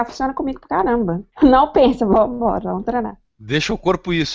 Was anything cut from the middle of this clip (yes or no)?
yes